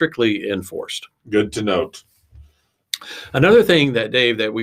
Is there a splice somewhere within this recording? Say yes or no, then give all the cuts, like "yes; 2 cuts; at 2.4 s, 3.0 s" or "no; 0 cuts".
no; 0 cuts